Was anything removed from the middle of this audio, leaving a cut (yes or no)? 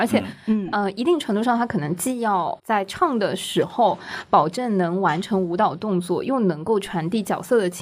yes